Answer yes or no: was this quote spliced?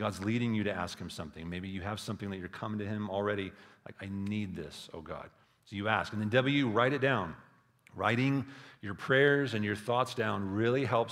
no